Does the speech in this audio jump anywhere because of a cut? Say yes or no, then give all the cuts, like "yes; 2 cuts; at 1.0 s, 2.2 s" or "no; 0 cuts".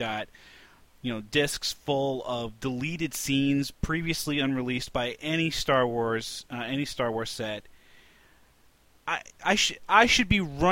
no; 0 cuts